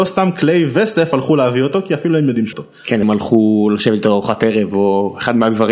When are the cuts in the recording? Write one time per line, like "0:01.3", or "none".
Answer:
0:02.5
0:03.0